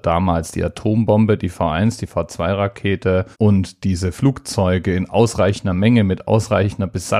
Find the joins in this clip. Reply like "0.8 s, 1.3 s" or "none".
3.3 s